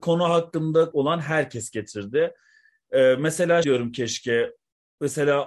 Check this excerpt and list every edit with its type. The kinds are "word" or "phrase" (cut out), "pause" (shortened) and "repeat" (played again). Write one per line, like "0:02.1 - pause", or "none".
0:00.9 - word
0:03.6 - word